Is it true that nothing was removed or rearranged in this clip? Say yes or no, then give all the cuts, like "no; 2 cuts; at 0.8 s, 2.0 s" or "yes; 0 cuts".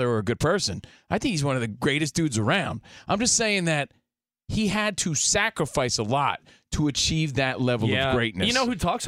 yes; 0 cuts